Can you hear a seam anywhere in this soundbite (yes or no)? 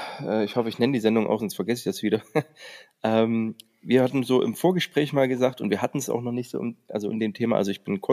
yes